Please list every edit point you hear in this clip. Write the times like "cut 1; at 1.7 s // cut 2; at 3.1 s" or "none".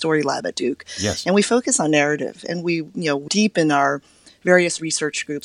cut 1; at 3.3 s